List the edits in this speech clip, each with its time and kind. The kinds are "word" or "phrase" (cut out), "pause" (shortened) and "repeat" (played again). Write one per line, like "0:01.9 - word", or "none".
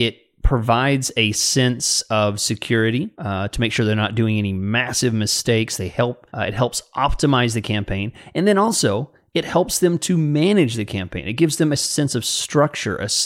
0:03.1 - pause
0:06.3 - pause